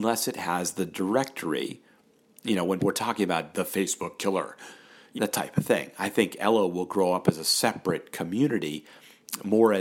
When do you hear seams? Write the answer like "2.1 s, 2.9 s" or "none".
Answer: 2.8 s, 3.5 s, 5.2 s